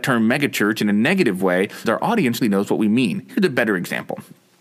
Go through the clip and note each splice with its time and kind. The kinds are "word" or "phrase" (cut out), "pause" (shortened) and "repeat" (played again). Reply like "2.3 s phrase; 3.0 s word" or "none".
1.8 s word; 2.4 s word